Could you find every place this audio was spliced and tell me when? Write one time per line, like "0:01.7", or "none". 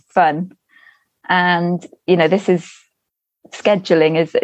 none